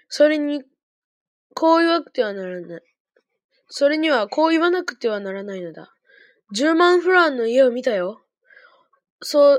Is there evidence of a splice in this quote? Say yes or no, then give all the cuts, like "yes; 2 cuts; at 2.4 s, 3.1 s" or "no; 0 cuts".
no; 0 cuts